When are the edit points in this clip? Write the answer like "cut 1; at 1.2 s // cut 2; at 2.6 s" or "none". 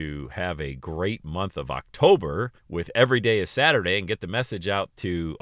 cut 1; at 2.6 s